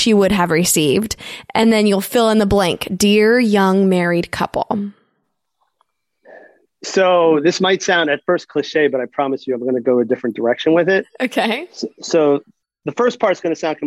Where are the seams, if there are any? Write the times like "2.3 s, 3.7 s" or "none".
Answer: none